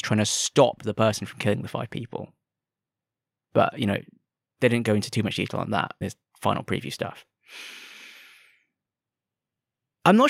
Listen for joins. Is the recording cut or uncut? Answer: cut